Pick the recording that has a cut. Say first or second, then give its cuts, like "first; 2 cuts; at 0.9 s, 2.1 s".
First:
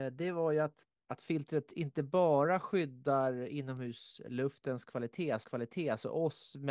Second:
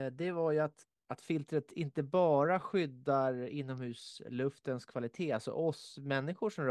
first; 1 cut; at 5.4 s